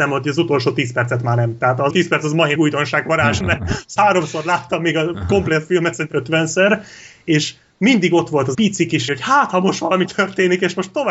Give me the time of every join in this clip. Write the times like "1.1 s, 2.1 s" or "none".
1.9 s, 2.6 s, 3.4 s, 4.0 s, 6.1 s, 8.5 s, 9.1 s, 10.1 s